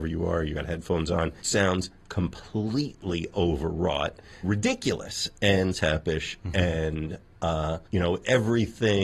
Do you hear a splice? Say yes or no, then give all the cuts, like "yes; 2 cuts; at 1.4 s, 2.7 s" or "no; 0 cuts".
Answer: yes; 4 cuts; at 1.4 s, 4.4 s, 5.7 s, 7.9 s